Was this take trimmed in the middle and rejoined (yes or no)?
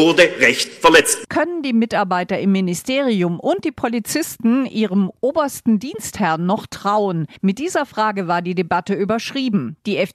yes